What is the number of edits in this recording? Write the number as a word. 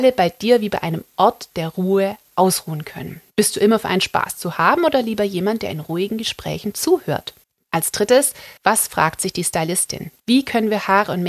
four